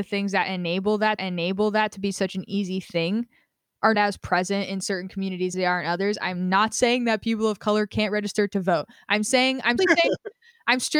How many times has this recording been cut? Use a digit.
4